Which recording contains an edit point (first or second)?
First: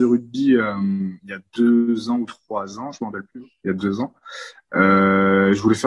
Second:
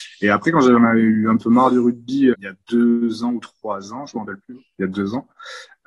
second